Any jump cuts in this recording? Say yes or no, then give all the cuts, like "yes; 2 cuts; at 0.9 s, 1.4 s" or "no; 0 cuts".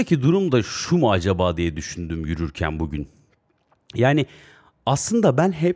no; 0 cuts